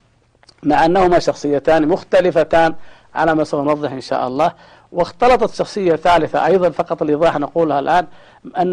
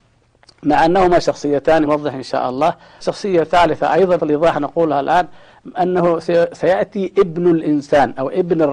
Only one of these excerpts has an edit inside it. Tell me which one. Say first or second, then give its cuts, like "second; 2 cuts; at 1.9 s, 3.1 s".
second; 3 cuts; at 1.8 s, 3.0 s, 4.2 s